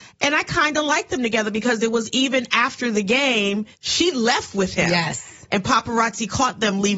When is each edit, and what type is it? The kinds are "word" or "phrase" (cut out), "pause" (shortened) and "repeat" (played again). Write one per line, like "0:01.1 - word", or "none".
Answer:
0:03.7 - pause